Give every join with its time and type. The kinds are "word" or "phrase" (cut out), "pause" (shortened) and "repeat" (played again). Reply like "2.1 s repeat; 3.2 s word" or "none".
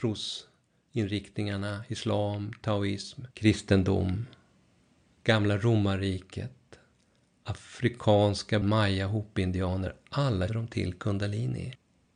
3.3 s pause; 8.6 s word; 10.5 s word